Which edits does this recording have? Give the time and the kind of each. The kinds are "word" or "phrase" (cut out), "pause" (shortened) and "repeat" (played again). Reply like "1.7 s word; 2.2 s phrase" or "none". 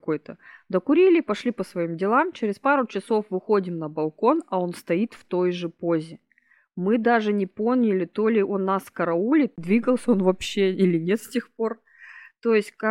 none